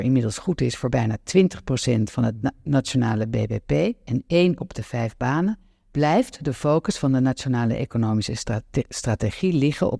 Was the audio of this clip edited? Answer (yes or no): no